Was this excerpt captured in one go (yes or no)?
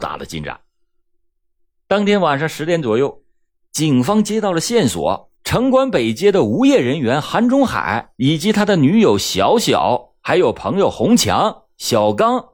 no